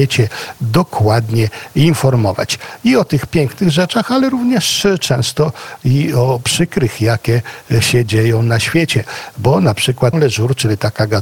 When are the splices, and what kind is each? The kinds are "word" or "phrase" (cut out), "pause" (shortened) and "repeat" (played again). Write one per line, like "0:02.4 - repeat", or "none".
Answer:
0:10.1 - word